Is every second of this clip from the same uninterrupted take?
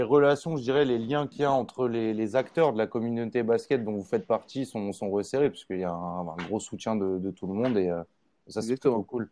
yes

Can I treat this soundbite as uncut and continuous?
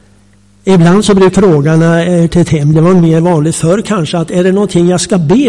no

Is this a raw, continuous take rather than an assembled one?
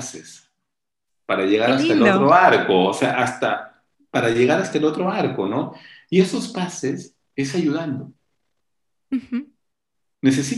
yes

